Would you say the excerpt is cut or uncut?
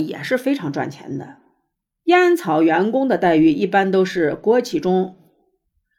cut